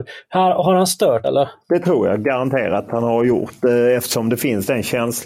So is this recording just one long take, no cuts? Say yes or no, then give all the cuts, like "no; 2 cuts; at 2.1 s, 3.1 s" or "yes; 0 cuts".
no; 3 cuts; at 1.2 s, 1.6 s, 2.9 s